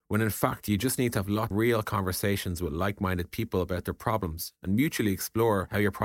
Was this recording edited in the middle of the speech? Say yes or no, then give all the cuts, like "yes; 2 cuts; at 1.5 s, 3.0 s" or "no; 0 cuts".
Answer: yes; 1 cut; at 1.5 s